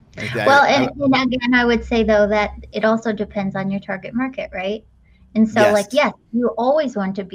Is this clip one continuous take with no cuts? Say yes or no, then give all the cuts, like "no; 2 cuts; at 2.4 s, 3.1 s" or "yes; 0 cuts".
yes; 0 cuts